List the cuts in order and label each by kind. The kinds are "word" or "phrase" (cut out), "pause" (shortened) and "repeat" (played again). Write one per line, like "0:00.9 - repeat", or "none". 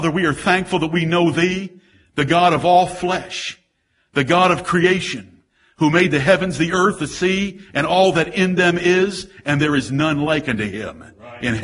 none